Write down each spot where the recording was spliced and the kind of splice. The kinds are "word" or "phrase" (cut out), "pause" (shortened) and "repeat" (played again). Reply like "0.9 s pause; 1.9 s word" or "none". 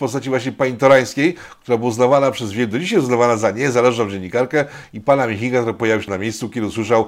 6.1 s word